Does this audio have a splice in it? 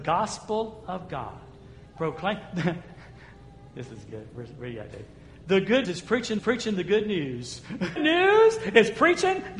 yes; 3 cuts; at 5.8 s, 6.4 s, 8.0 s

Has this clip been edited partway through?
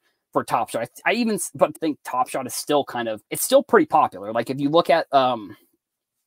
yes; 2 cuts; at 1.8 s, 3.3 s

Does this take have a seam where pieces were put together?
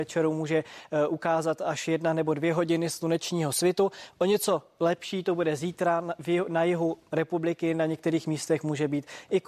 no; 0 cuts

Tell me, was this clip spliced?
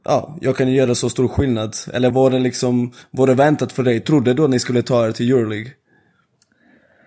yes; 1 cut; at 2.1 s

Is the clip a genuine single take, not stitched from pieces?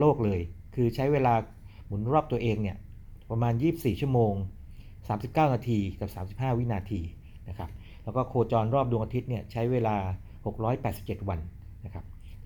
yes; 0 cuts

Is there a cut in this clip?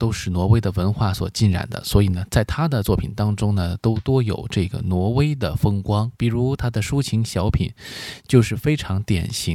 yes; 1 cut; at 6.2 s

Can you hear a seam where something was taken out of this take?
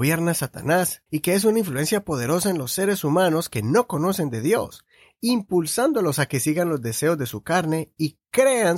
yes; 1 cut; at 1.1 s

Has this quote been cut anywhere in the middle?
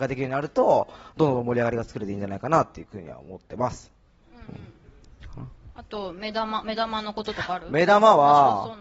no; 0 cuts

